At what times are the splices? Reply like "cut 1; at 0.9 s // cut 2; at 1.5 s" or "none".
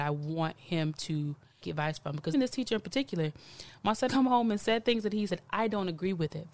cut 1; at 1.6 s // cut 2; at 2.3 s // cut 3; at 4.1 s // cut 4; at 5.3 s